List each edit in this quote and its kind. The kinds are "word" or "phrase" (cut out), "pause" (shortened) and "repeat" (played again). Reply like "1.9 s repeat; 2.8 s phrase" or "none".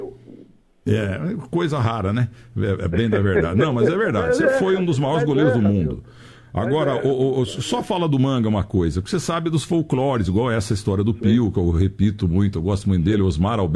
none